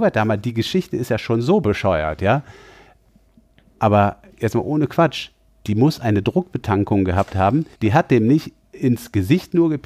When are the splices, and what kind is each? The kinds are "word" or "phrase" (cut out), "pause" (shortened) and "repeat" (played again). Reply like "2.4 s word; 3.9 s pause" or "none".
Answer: 7.7 s pause

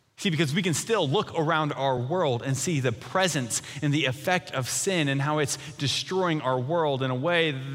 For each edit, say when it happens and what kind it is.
none

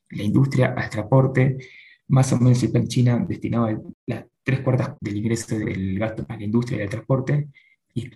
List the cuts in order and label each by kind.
2.8 s word; 4.9 s word; 5.6 s word; 6.3 s word

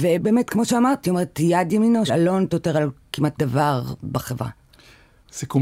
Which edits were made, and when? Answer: 1.0 s word; 2.1 s word; 2.5 s word; 3.4 s word

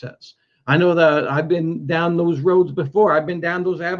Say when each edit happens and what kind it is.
none

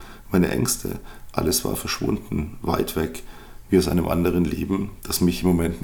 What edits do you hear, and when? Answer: none

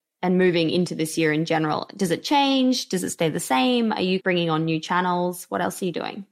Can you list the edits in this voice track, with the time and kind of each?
4.2 s phrase

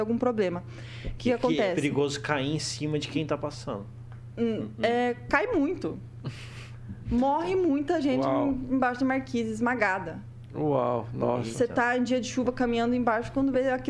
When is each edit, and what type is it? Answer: none

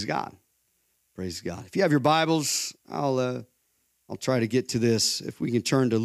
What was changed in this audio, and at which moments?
none

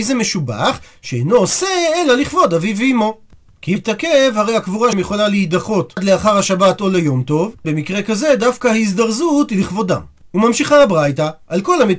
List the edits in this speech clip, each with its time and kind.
3.8 s word; 4.9 s word; 7.6 s word

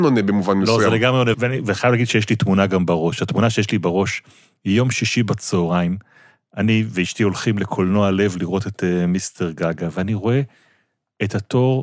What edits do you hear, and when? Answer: 1.3 s word

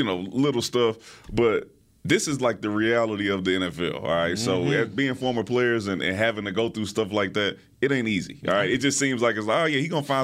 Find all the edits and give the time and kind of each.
none

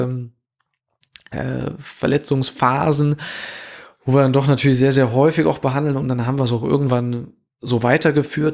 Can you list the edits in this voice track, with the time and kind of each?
none

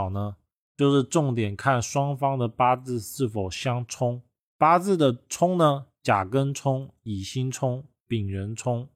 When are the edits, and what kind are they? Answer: none

